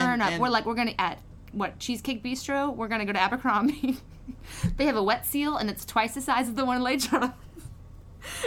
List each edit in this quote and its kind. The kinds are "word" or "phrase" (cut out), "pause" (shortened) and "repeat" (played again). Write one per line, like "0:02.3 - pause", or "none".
0:01.0 - word